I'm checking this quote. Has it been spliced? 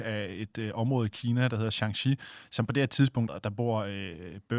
yes; 1 cut; at 3.3 s

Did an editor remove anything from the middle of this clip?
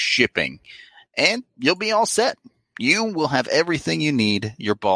no; 0 cuts

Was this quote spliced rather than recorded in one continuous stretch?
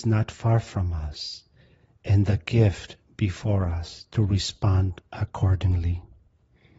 no; 0 cuts

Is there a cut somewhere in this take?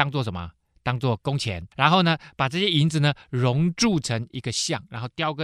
yes; 1 cut; at 1.7 s

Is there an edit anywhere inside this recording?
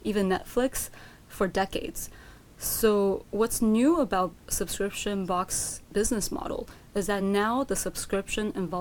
no; 0 cuts

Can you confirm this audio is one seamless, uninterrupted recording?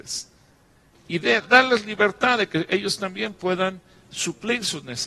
yes; 0 cuts

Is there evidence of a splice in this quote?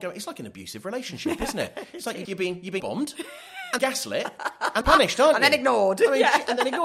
yes; 4 cuts; at 2.2 s, 2.8 s, 3.8 s, 4.8 s

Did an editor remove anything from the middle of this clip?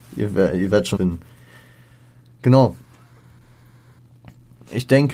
yes; 1 cut; at 1.0 s

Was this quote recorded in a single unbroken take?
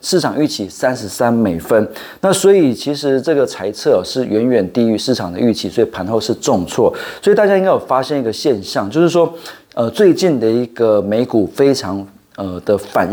yes; 0 cuts

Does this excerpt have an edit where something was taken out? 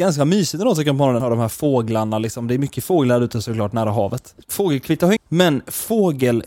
yes; 3 cuts; at 1.2 s, 4.4 s, 5.2 s

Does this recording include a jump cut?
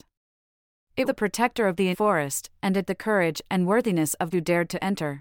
yes; 4 cuts; at 1.1 s, 1.9 s, 2.9 s, 4.3 s

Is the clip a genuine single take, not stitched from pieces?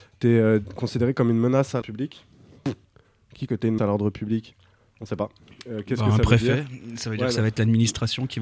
no; 3 cuts; at 1.8 s, 3.5 s, 3.8 s

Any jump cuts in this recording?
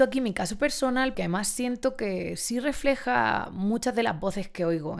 yes; 1 cut; at 1.1 s

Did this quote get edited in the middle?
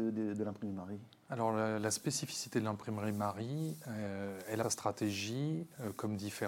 yes; 1 cut; at 4.6 s

